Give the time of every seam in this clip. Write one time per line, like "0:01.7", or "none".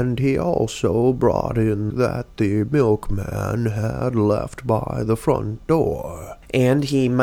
0:01.9